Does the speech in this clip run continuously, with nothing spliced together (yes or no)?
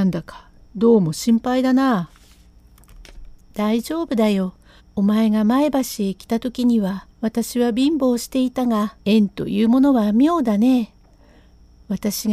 no